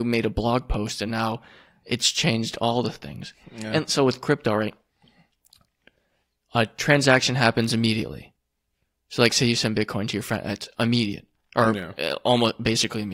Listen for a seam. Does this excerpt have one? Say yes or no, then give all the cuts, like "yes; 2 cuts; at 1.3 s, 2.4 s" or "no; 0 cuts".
no; 0 cuts